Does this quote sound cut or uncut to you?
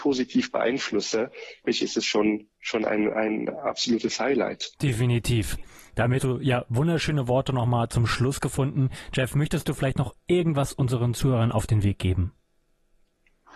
cut